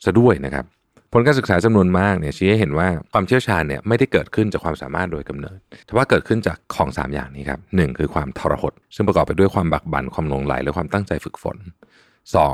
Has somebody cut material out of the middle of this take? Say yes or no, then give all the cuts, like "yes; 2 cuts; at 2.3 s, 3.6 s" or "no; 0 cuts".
yes; 3 cuts; at 5.8 s, 6.6 s, 8.8 s